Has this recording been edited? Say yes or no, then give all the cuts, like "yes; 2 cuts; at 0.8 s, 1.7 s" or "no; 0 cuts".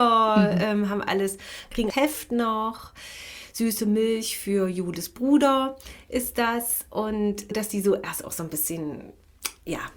yes; 2 cuts; at 1.9 s, 7.5 s